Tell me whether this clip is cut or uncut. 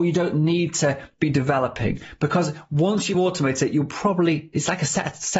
uncut